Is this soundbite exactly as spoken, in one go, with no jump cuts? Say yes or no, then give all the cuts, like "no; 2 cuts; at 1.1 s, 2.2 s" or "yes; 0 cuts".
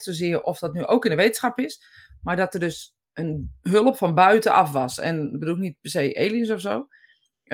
yes; 0 cuts